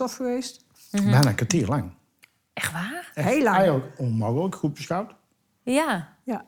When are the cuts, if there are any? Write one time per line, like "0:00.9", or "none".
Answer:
none